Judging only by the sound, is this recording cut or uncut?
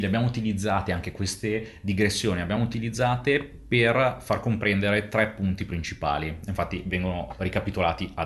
uncut